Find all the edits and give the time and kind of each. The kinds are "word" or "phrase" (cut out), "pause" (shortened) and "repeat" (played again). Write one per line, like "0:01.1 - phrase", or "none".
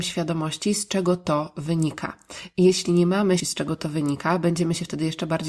0:03.4 - word